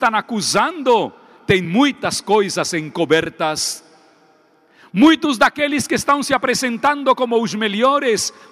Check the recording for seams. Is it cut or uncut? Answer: uncut